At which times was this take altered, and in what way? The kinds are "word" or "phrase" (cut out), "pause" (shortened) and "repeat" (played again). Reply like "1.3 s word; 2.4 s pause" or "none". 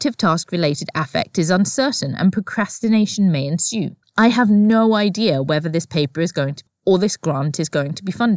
4.0 s pause; 6.7 s word